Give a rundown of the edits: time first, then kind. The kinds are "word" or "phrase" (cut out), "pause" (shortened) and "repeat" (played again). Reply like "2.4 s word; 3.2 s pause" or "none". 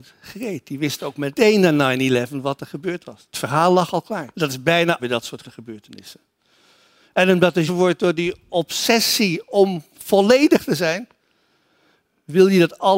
4.3 s pause; 5.0 s phrase; 5.4 s word; 7.7 s phrase